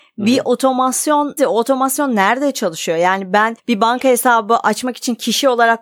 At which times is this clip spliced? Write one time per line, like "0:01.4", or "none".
0:01.4
0:03.6